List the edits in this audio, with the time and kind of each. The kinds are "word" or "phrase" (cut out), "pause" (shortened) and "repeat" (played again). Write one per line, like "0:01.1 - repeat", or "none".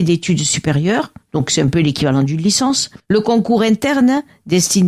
0:03.0 - pause